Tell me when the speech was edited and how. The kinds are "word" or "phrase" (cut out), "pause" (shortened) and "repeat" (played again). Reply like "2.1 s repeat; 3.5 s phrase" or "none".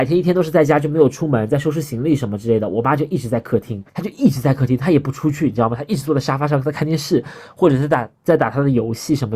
3.9 s pause